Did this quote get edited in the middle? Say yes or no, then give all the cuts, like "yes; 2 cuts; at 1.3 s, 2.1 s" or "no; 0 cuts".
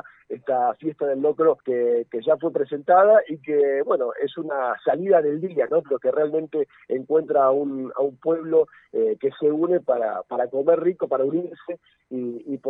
yes; 1 cut; at 1.6 s